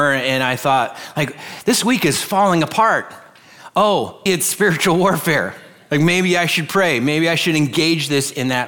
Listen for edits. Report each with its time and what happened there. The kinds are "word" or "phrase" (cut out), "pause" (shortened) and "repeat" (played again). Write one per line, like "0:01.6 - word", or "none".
0:04.3 - word